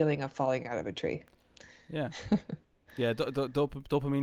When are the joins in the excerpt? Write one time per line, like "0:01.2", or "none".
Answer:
none